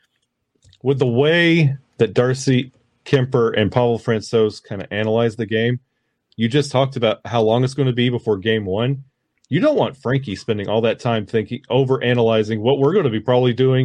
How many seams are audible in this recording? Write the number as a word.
zero